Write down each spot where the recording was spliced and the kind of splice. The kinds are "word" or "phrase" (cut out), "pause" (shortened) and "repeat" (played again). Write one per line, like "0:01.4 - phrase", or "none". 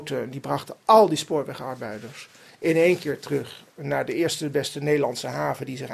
none